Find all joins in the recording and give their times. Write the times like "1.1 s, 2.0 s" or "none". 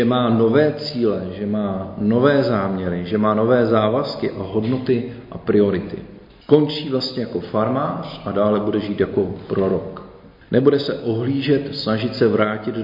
none